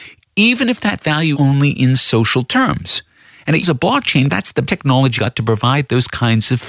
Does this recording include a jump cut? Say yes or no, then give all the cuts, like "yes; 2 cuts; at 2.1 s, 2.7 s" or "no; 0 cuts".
yes; 5 cuts; at 1.3 s, 3.6 s, 4.3 s, 4.7 s, 5.2 s